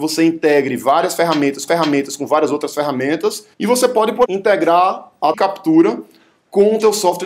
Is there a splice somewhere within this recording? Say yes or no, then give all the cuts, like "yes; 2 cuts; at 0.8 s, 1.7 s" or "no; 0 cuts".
yes; 4 cuts; at 1.7 s, 3.5 s, 4.3 s, 5.3 s